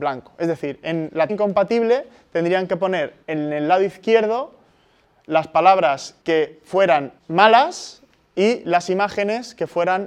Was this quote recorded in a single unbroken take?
no; 4 cuts; at 1.3 s, 3.2 s, 6.2 s, 7.2 s

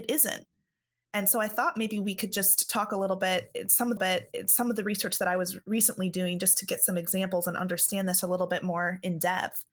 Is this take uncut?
no; 1 cut; at 4.0 s

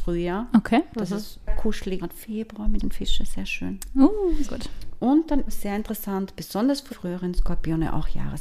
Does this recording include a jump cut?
yes; 6 cuts; at 1.5 s, 2.0 s, 2.8 s, 4.4 s, 5.5 s, 6.9 s

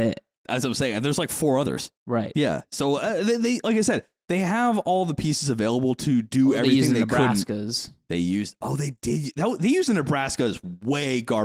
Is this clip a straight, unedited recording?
no; 1 cut; at 2.0 s

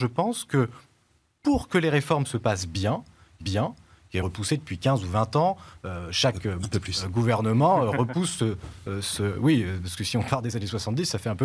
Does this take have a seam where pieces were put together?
yes; 2 cuts; at 3.4 s, 4.2 s

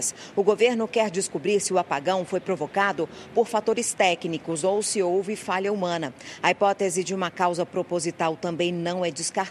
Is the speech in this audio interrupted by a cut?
no; 0 cuts

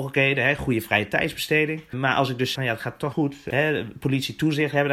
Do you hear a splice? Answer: yes; 2 cuts; at 2.5 s, 3.1 s

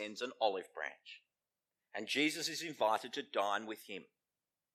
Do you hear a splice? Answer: no; 0 cuts

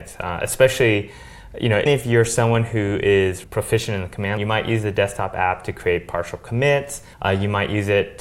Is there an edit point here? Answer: yes; 4 cuts; at 1.9 s, 3.4 s, 4.4 s, 7.1 s

